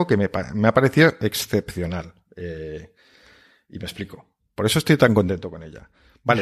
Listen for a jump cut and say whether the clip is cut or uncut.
uncut